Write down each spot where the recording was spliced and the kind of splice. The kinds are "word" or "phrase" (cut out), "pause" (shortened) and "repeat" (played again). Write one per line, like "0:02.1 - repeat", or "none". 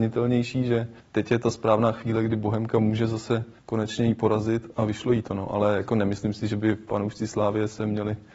0:01.0 - pause
0:03.6 - pause